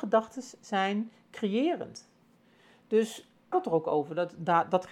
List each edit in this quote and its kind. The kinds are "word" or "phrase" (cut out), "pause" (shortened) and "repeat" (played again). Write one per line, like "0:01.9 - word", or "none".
0:03.5 - phrase